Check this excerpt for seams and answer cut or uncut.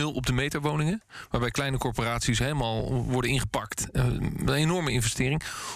uncut